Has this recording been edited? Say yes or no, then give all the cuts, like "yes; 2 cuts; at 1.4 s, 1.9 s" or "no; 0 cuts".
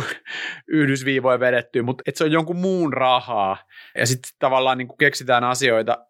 yes; 2 cuts; at 2.0 s, 4.0 s